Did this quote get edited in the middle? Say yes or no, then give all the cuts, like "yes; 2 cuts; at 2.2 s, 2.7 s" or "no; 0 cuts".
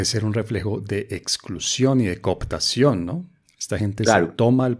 no; 0 cuts